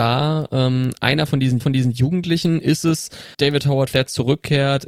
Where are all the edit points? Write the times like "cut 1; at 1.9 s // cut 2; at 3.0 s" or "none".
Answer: cut 1; at 1.6 s // cut 2; at 3.3 s // cut 3; at 3.9 s